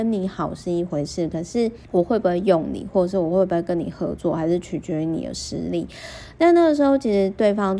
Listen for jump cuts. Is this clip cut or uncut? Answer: cut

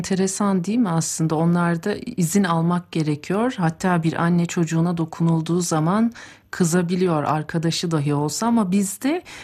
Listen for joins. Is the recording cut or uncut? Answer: uncut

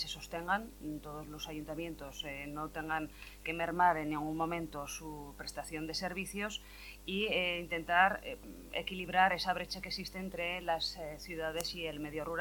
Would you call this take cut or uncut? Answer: uncut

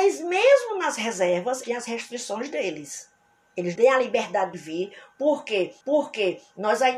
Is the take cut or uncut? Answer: cut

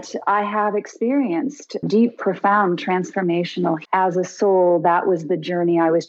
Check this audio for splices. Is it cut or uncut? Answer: cut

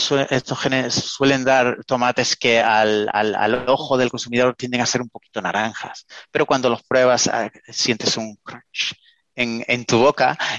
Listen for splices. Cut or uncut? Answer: uncut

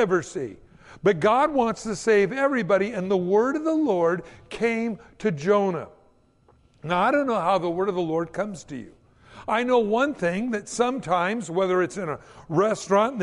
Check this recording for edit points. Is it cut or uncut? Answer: uncut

